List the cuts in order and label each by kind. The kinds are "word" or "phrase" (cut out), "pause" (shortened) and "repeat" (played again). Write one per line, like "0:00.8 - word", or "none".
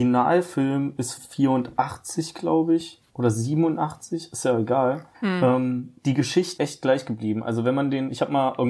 0:01.2 - word
0:03.1 - pause
0:05.1 - pause
0:06.6 - word